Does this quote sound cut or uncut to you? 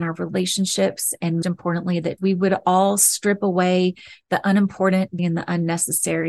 cut